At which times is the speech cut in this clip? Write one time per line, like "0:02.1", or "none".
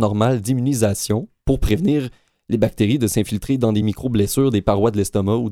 none